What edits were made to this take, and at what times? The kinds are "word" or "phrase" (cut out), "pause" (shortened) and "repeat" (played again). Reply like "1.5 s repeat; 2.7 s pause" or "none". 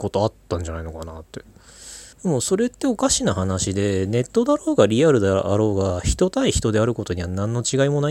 2.1 s pause